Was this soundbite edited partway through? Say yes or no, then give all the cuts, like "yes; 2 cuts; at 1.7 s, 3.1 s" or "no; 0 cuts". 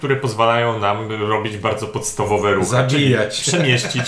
no; 0 cuts